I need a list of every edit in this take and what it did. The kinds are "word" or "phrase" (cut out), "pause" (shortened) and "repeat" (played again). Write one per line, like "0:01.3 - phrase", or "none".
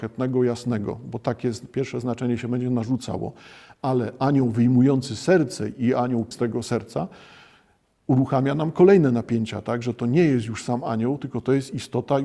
0:06.3 - word